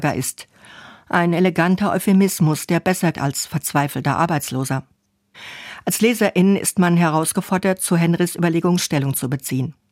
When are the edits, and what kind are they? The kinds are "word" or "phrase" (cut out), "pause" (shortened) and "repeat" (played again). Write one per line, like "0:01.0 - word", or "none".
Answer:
0:03.1 - word